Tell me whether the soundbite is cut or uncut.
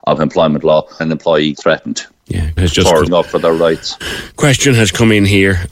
cut